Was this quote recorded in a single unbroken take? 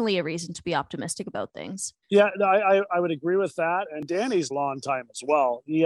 no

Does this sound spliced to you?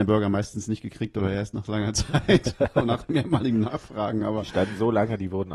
no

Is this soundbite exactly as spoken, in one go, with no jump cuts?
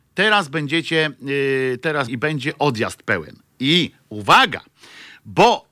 no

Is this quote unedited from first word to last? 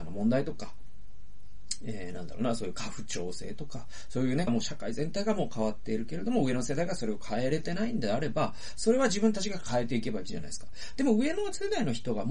no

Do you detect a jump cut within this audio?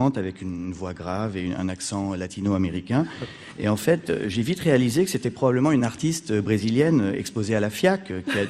no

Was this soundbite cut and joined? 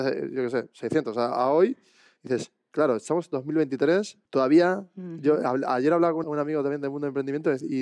yes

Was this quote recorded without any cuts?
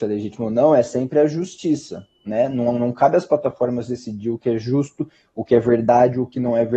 yes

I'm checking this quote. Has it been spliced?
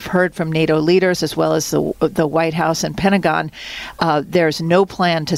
no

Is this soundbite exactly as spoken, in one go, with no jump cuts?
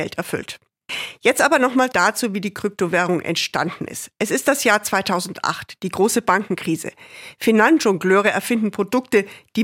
no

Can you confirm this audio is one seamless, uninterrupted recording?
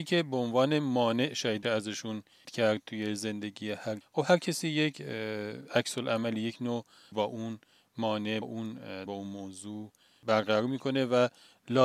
no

